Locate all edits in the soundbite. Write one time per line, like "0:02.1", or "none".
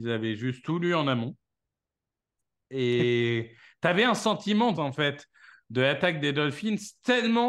0:04.7